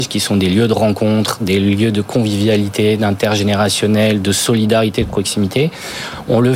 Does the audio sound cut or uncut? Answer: uncut